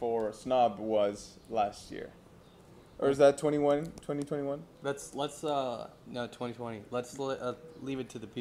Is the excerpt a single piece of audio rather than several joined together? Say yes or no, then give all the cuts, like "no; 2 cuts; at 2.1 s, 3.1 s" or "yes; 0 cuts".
yes; 0 cuts